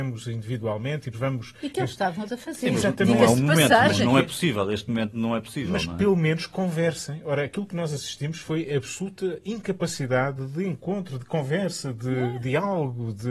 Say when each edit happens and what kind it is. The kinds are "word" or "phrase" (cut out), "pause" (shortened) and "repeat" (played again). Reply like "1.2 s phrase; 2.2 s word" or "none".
1.1 s word; 2.3 s word